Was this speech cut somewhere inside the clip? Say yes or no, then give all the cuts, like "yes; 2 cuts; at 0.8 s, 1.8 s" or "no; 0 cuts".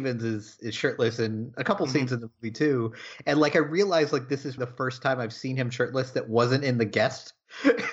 yes; 1 cut; at 4.6 s